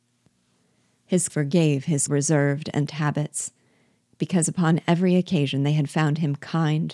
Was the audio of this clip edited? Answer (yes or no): yes